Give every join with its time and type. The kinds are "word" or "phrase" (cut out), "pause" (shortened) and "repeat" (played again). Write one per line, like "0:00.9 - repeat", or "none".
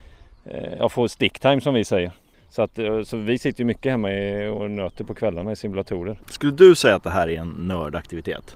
0:02.3 - pause
0:06.2 - pause